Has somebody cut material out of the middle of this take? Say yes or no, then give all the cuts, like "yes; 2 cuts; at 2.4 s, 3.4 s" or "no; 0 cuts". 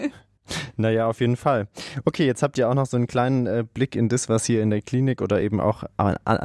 no; 0 cuts